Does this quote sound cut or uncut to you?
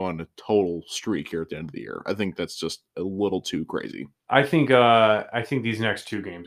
uncut